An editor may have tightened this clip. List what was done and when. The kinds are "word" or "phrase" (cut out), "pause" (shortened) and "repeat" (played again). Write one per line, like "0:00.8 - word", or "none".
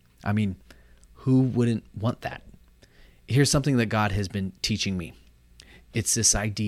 none